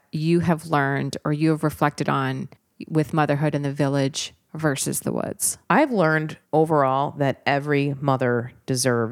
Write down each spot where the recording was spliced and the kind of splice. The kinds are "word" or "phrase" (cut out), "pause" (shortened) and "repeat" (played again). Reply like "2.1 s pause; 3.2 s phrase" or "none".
5.6 s pause; 6.4 s pause